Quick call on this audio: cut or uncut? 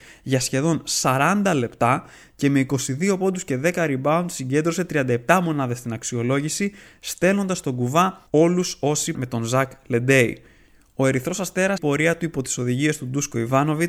cut